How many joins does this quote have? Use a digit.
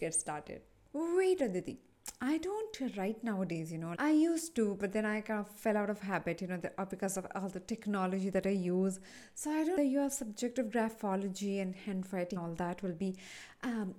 4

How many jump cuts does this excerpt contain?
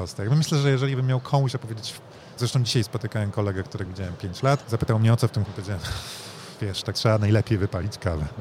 4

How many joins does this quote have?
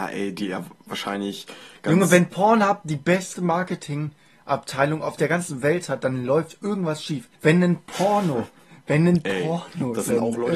1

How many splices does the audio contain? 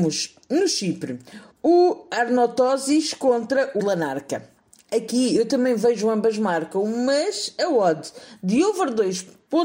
2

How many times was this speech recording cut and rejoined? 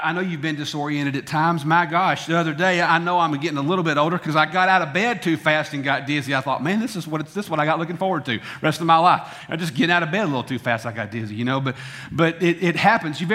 0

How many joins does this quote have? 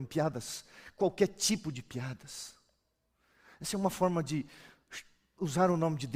0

